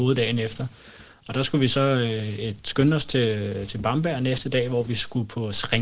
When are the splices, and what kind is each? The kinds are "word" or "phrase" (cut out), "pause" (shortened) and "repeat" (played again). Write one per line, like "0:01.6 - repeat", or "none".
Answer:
none